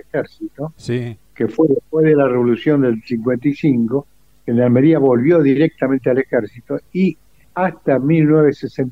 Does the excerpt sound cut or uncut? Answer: uncut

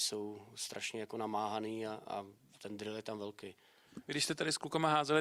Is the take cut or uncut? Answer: uncut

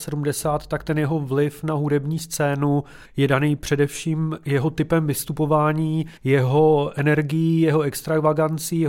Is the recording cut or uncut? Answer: cut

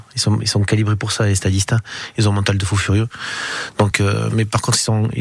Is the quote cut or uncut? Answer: uncut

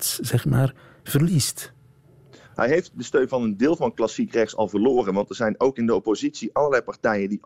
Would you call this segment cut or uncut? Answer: uncut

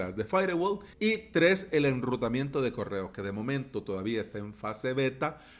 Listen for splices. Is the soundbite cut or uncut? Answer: cut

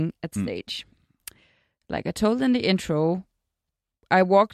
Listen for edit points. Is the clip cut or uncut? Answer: uncut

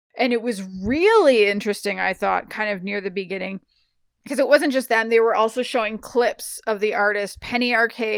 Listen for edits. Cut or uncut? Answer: uncut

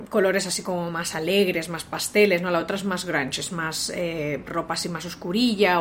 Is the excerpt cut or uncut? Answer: uncut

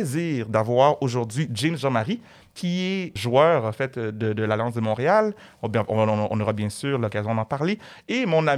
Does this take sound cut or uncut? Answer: cut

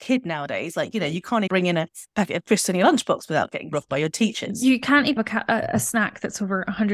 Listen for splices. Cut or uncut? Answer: cut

